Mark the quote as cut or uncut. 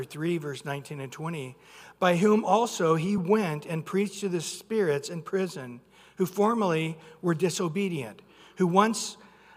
uncut